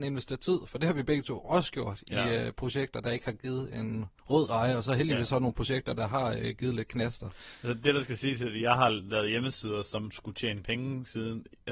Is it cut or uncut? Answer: cut